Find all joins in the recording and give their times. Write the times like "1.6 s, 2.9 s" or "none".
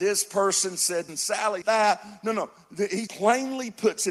1.1 s, 1.6 s, 3.1 s